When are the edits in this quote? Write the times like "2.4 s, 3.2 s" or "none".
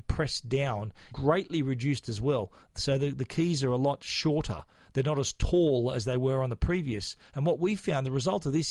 1.1 s